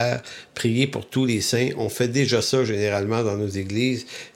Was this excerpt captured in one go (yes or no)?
yes